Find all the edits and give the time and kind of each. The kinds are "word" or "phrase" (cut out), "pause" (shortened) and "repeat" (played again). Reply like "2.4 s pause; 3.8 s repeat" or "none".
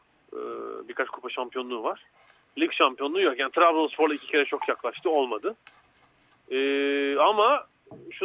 none